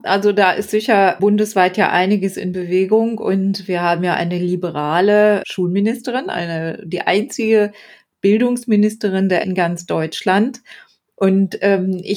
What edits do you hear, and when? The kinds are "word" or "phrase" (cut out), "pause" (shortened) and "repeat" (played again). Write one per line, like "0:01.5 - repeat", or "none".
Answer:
0:09.4 - word

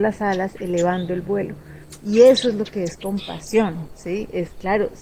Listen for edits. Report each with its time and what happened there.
none

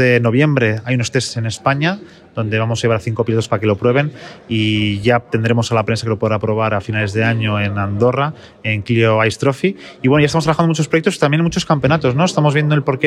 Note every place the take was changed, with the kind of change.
none

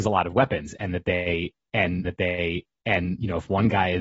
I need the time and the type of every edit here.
0:02.0 - repeat

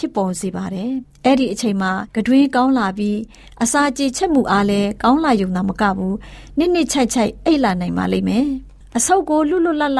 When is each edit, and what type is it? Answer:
0:02.1 - pause

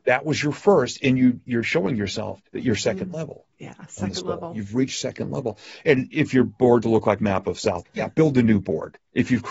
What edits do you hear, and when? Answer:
0:01.6 - word
0:02.5 - pause
0:03.5 - pause
0:06.8 - word
0:07.2 - phrase
0:07.9 - word

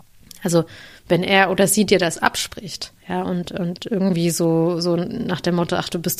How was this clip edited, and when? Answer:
0:03.0 - pause

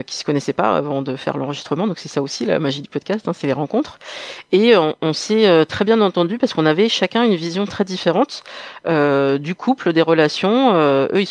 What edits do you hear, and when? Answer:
none

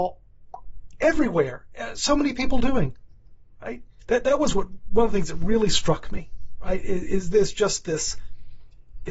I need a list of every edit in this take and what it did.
none

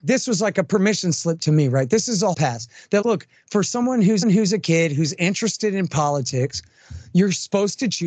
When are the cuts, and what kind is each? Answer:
0:02.3 - word
0:03.0 - word
0:04.2 - repeat

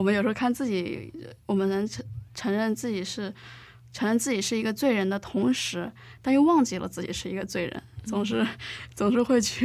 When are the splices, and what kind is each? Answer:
none

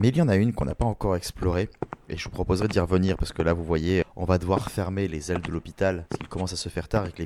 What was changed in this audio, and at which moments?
0:04.0 - word

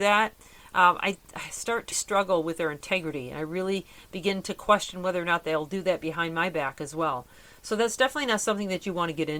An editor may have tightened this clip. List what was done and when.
0:01.9 - word

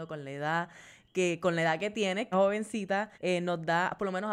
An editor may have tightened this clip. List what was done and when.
0:02.3 - word
0:03.1 - pause

